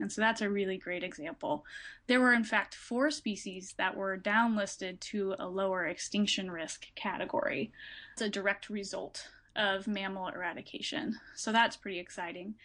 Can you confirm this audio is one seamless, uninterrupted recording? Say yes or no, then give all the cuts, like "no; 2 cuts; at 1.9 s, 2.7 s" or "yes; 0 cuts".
no; 1 cut; at 8.2 s